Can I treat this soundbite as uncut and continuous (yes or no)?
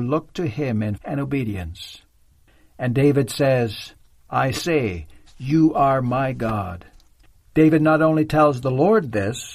no